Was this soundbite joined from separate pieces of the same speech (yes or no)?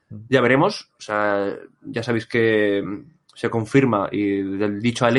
no